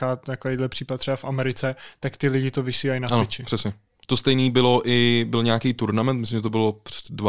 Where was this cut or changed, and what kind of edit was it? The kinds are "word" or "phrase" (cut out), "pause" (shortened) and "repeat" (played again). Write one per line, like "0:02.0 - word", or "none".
0:04.0 - pause